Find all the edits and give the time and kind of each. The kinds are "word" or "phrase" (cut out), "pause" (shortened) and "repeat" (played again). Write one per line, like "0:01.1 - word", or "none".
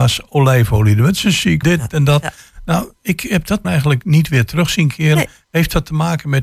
0:01.6 - word
0:03.6 - word